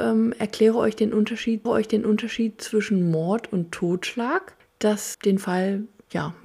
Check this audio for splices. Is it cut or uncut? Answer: cut